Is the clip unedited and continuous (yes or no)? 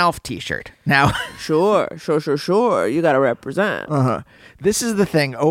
yes